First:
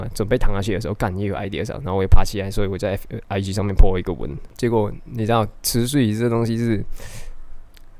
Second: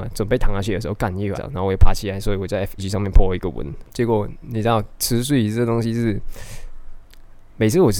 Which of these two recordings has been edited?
second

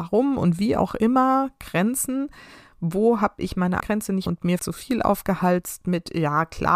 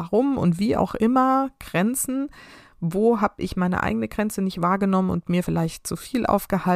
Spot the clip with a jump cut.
first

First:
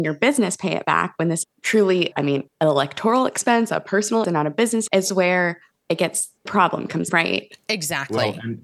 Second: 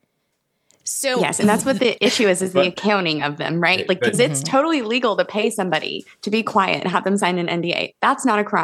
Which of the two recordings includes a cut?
first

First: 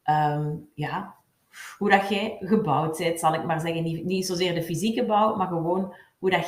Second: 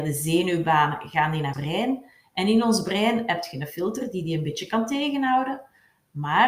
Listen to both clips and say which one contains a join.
second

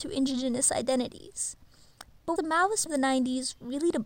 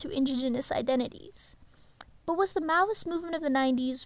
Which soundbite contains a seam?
first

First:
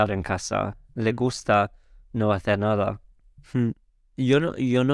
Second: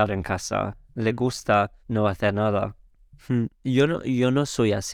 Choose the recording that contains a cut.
second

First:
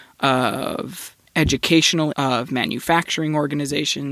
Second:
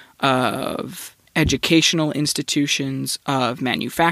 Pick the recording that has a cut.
first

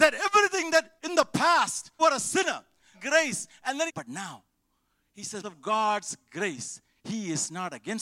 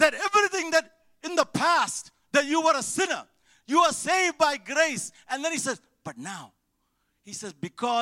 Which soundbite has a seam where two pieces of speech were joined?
first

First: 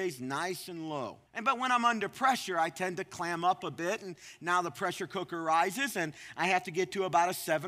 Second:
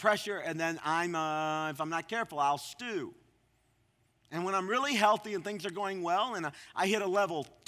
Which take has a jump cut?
first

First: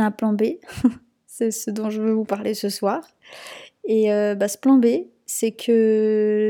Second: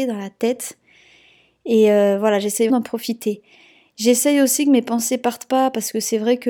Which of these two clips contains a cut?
second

